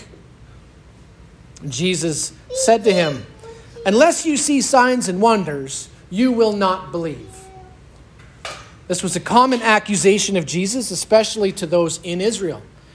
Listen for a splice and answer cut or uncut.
uncut